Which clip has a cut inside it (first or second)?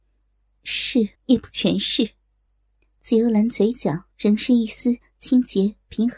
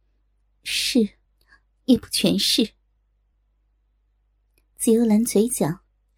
first